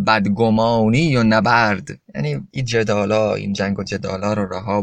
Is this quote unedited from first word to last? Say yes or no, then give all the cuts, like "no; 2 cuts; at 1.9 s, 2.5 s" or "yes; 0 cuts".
yes; 0 cuts